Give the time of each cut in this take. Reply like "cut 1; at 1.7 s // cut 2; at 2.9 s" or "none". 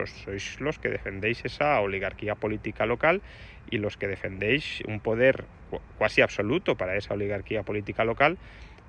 none